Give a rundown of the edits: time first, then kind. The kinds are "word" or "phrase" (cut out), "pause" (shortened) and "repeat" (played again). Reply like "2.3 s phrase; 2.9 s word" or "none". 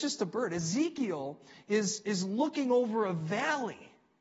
none